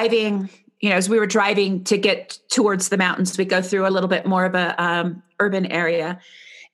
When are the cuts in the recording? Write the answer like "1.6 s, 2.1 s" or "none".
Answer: none